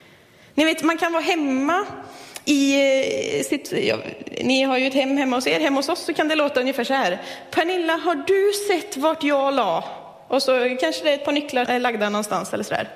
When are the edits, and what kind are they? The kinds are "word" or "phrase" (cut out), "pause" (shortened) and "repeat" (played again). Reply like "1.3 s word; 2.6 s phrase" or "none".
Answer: 11.6 s word